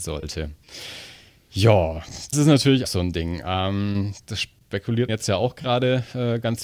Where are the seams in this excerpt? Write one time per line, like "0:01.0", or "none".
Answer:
0:02.3
0:02.8
0:05.1